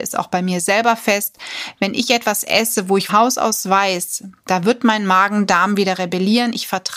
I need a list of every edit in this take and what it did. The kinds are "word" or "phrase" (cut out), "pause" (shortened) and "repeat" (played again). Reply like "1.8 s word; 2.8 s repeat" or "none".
3.1 s word